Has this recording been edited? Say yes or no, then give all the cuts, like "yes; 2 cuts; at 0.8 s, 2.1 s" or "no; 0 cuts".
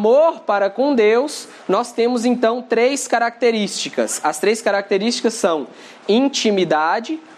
no; 0 cuts